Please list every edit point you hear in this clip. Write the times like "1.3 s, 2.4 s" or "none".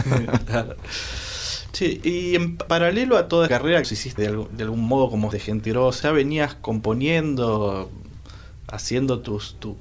2.0 s, 2.7 s, 3.5 s, 3.8 s, 4.2 s, 5.3 s, 5.7 s, 6.0 s